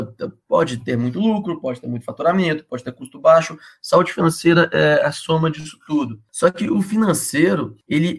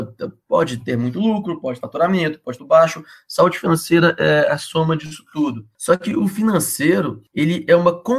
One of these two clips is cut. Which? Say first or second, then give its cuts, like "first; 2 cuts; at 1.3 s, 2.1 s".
second; 2 cuts; at 1.8 s, 2.6 s